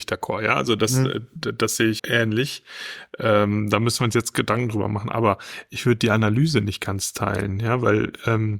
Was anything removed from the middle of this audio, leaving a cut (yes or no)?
yes